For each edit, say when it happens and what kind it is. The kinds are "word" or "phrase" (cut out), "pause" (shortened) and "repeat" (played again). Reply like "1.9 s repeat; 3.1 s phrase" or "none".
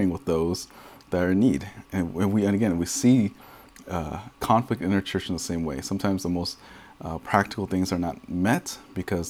none